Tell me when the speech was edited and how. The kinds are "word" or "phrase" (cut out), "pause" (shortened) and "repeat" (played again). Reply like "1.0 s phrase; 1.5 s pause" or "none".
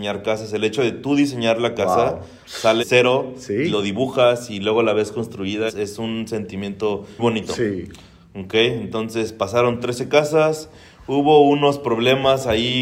2.8 s word; 5.7 s word; 7.2 s word